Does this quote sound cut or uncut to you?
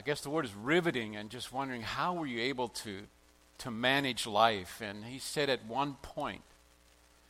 uncut